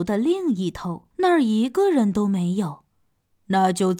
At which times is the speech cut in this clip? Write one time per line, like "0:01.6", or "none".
0:01.1
0:02.9